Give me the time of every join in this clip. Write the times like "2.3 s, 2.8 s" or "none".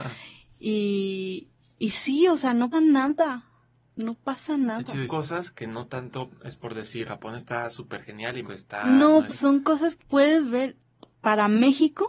2.7 s, 5.1 s, 5.5 s, 7.1 s, 8.5 s, 9.3 s, 10.0 s